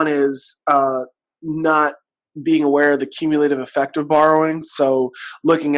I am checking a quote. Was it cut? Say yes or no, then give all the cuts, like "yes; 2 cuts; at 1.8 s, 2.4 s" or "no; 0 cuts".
no; 0 cuts